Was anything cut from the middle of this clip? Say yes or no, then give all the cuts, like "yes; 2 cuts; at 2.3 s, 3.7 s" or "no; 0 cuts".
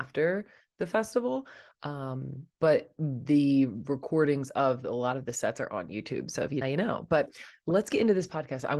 yes; 1 cut; at 6.6 s